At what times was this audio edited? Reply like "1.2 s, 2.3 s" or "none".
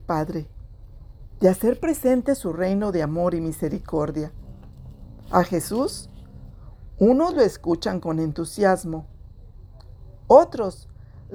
none